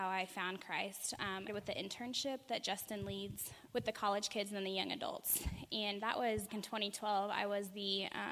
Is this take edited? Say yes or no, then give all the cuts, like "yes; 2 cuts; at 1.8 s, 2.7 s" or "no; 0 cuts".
yes; 3 cuts; at 1.5 s, 3.7 s, 6.5 s